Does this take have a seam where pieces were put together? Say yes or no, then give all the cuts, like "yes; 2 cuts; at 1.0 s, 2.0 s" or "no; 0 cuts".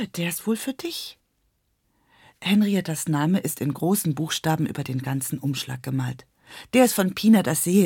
no; 0 cuts